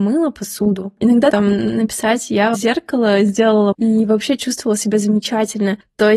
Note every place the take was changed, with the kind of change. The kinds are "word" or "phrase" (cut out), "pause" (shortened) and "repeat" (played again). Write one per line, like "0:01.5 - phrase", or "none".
0:01.3 - word
0:02.5 - phrase
0:03.7 - word